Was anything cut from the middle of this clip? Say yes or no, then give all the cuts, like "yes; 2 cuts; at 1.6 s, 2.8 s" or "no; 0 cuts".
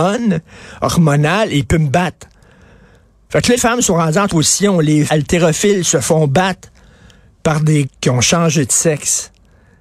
yes; 4 cuts; at 3.6 s, 4.3 s, 5.1 s, 7.8 s